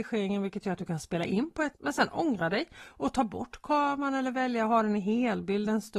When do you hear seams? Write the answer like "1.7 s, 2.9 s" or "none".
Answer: 1.7 s